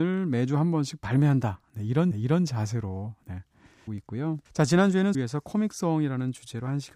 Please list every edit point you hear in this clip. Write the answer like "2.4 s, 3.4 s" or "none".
2.1 s, 3.9 s, 4.5 s, 5.1 s